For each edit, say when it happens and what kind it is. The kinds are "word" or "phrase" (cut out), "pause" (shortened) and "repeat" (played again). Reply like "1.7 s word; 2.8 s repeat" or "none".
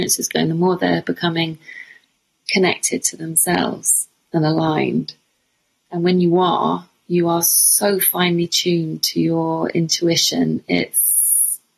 none